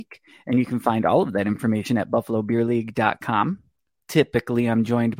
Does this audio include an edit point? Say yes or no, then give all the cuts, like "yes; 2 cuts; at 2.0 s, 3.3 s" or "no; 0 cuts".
no; 0 cuts